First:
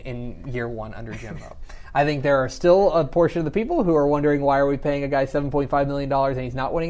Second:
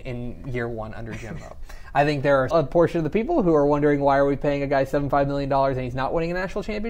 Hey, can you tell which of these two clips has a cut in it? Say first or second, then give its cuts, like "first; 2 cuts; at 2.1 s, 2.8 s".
second; 2 cuts; at 2.5 s, 5.1 s